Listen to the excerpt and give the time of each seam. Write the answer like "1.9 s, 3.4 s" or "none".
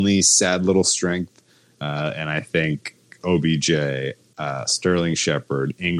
none